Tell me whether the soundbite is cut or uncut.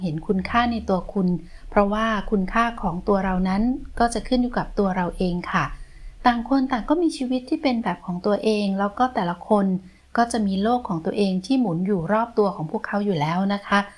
uncut